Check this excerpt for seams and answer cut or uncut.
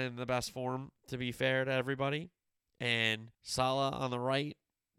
cut